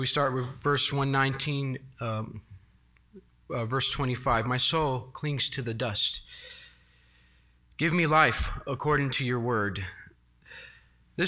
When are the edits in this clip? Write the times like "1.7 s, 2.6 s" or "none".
none